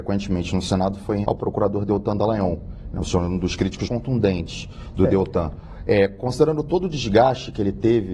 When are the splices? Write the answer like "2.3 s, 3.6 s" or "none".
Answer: 1.2 s, 3.9 s